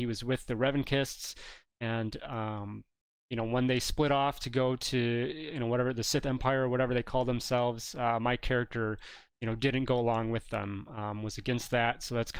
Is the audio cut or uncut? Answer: uncut